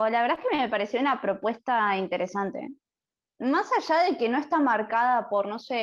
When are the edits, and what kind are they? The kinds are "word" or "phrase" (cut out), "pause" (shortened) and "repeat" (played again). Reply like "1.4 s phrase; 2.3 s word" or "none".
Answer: none